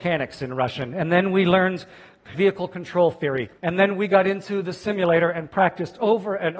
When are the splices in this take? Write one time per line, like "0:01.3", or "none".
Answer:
0:02.3
0:03.6